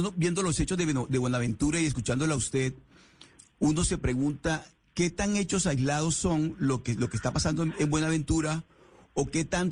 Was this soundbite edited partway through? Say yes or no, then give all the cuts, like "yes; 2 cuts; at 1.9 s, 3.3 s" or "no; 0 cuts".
no; 0 cuts